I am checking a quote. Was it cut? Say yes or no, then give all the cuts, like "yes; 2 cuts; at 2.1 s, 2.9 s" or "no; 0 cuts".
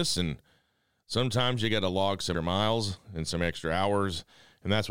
yes; 1 cut; at 2.3 s